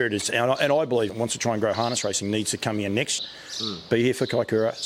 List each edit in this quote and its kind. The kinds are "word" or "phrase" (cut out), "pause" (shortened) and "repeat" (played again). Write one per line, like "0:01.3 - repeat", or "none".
0:01.1 - word
0:03.2 - word